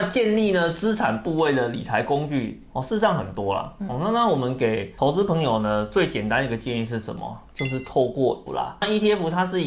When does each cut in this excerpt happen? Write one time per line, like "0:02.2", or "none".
0:08.5